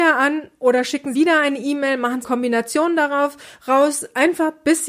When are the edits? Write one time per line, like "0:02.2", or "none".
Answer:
0:01.1
0:02.2